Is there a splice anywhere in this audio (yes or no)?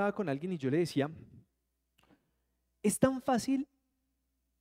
no